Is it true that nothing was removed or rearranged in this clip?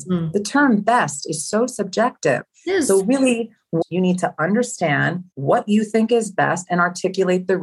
no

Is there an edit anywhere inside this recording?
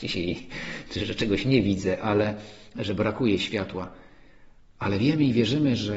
no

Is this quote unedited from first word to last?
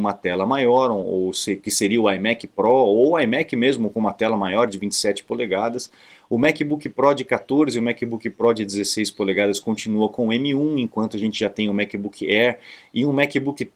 yes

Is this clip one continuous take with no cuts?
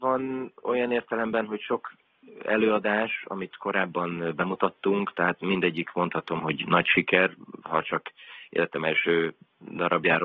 yes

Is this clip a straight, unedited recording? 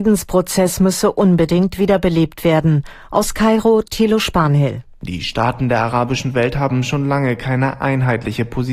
yes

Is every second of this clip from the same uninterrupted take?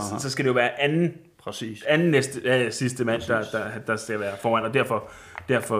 yes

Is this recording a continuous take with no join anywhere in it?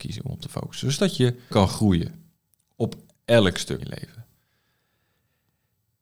no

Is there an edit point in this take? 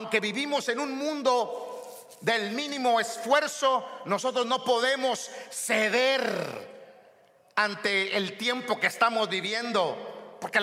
no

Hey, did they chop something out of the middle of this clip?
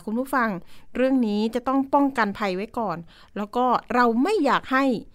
no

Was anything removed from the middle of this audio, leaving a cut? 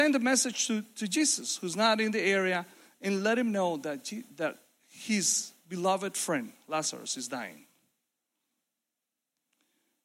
no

